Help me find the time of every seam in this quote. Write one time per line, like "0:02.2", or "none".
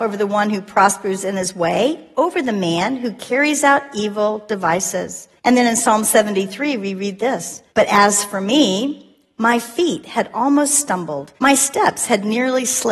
0:05.4
0:07.7
0:11.4

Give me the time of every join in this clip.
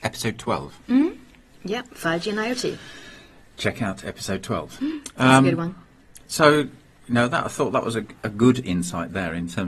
none

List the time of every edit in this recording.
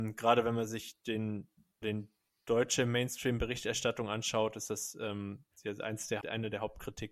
0:01.8
0:06.2

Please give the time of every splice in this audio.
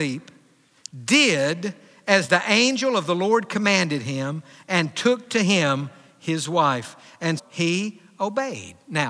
0:07.4

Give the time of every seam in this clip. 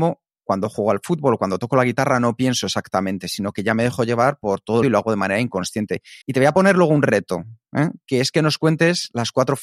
0:04.8
0:06.2

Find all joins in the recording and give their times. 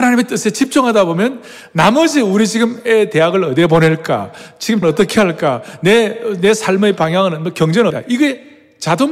0:04.8
0:07.9

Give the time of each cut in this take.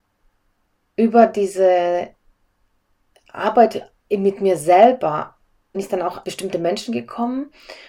0:05.7
0:06.2

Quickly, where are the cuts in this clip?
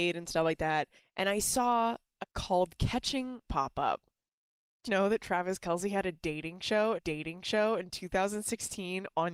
0:01.0
0:02.2
0:03.4
0:04.9
0:07.0

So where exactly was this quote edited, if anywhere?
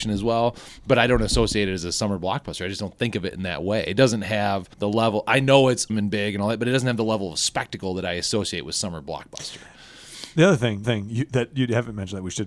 0:04.7
0:05.9
0:10.8

